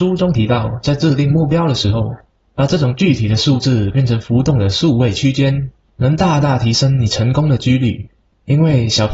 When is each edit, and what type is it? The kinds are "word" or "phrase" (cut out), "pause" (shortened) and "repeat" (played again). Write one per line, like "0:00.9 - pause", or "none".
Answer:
none